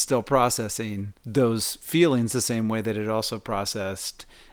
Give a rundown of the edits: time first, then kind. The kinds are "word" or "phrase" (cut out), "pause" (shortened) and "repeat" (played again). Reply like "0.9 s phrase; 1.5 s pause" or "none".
1.2 s pause